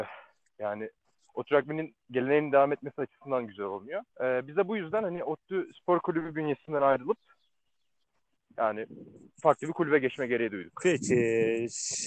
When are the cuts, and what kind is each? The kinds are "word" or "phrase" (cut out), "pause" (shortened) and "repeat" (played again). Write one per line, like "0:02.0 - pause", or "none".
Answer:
0:04.1 - pause

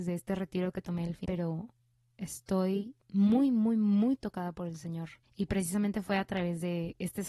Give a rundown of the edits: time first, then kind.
0:01.2 - phrase
0:03.0 - pause
0:05.2 - pause

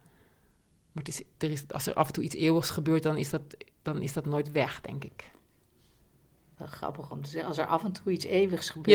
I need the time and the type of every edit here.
none

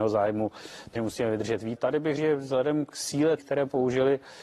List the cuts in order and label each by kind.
0:01.0 - word
0:01.8 - word
0:02.2 - word
0:03.4 - word

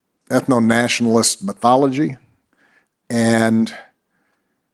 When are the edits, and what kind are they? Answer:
none

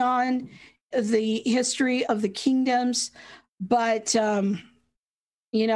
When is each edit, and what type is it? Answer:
0:00.9 - word
0:02.0 - word

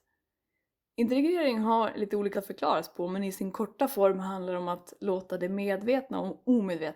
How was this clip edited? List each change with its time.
0:02.3 - word

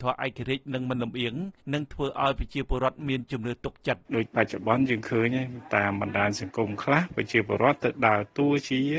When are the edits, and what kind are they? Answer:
0:01.6 - pause
0:04.1 - pause

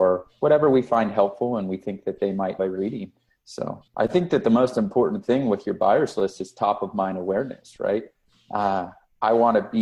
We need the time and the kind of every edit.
0:02.6 - word
0:03.9 - pause

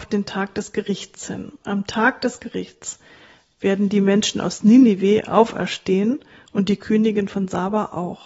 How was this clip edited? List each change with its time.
none

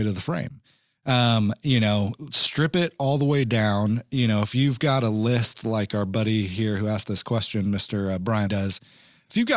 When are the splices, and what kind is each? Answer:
0:08.5 - word

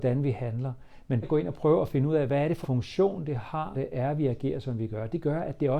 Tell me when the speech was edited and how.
0:01.2 - word
0:02.6 - word
0:03.7 - word

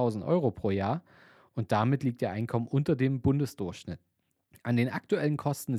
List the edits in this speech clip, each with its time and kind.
none

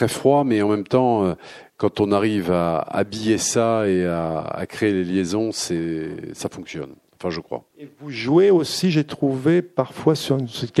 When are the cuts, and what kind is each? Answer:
0:07.0 - pause
0:07.7 - pause

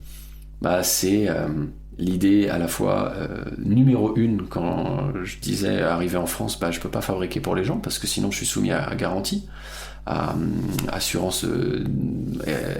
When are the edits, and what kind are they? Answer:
none

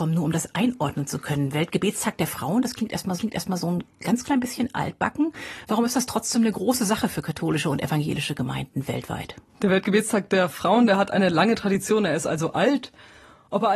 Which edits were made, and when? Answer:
0:03.2 - repeat
0:09.5 - pause

